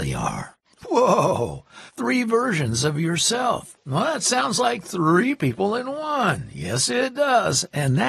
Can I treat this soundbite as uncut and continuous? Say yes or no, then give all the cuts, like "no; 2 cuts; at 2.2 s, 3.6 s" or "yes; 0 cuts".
no; 1 cut; at 1.9 s